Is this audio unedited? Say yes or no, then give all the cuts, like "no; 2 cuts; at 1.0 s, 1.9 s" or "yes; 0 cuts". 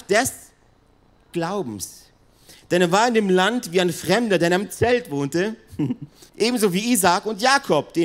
no; 1 cut; at 6.3 s